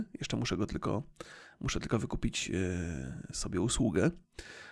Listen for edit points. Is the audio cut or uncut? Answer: uncut